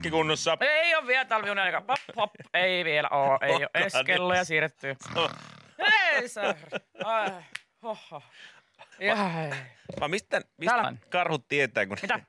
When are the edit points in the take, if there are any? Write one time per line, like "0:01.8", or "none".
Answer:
0:08.9
0:10.8